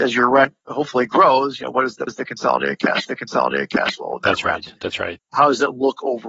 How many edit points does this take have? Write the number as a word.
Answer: three